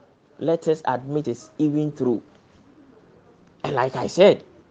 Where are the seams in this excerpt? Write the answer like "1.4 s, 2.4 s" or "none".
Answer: 1.2 s